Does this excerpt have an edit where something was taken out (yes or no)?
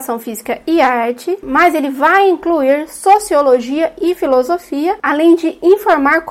no